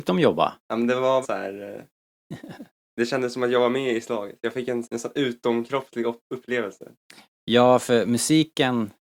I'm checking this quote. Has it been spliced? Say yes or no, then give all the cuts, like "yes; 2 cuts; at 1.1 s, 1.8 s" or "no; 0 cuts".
yes; 3 cuts; at 1.2 s, 2.8 s, 4.8 s